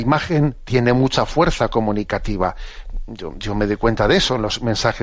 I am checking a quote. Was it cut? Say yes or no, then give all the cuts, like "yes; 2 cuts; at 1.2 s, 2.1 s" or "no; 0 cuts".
no; 0 cuts